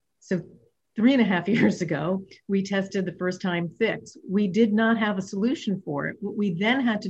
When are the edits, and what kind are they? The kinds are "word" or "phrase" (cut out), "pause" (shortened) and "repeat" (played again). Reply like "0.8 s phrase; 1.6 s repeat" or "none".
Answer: none